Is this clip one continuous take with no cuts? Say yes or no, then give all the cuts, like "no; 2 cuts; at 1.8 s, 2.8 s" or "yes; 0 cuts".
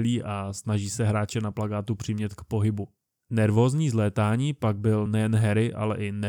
yes; 0 cuts